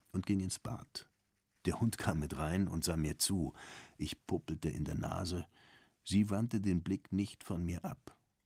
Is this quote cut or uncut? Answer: uncut